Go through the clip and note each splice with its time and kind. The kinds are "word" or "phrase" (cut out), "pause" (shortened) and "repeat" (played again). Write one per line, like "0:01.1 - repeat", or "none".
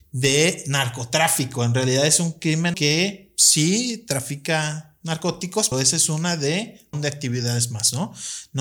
0:02.7 - word
0:05.7 - word
0:06.9 - word